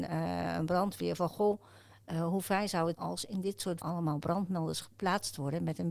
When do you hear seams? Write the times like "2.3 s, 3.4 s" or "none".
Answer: 2.9 s, 3.8 s